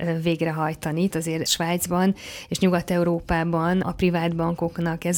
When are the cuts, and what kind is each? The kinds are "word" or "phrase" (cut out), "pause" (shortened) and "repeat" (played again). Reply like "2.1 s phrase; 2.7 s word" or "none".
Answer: 1.1 s word; 1.5 s word; 3.8 s word